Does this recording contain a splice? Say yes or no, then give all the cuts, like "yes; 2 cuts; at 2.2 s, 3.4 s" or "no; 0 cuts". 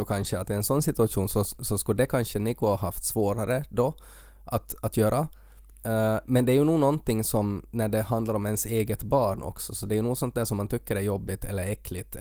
no; 0 cuts